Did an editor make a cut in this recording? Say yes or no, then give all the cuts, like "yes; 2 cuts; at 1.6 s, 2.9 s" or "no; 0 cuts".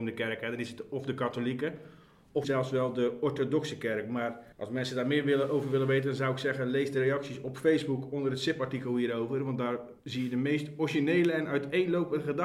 yes; 3 cuts; at 2.4 s, 4.5 s, 10.0 s